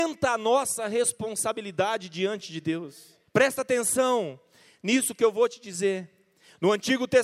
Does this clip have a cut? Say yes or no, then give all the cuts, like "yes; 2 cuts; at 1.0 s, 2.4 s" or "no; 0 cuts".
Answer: yes; 1 cut; at 3.3 s